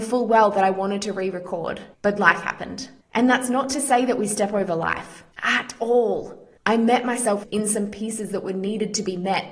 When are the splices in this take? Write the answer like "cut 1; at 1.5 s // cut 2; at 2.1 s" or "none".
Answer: cut 1; at 1.9 s // cut 2; at 3.0 s // cut 3; at 5.3 s // cut 4; at 6.6 s